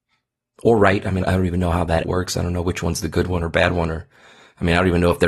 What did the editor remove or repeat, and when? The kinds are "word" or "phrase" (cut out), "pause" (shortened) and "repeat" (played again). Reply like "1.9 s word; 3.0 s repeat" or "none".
1.2 s word; 2.0 s word